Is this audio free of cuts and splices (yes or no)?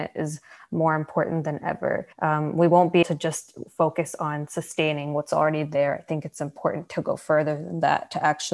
no